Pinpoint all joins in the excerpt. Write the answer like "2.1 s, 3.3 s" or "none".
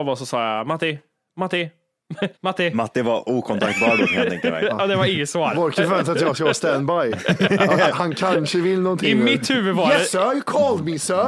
2.3 s